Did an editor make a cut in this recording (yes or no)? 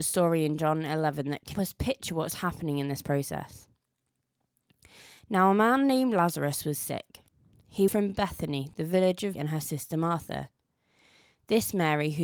yes